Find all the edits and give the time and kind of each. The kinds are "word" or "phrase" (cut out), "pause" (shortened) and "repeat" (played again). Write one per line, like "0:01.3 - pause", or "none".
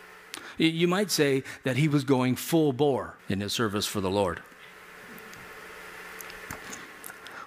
0:03.2 - pause